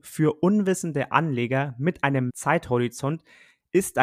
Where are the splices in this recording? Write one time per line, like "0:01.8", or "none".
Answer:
0:02.3